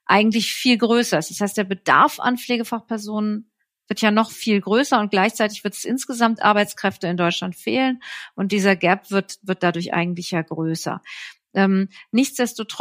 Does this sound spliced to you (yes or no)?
no